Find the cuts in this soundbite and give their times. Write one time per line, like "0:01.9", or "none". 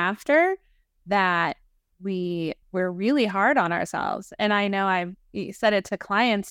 none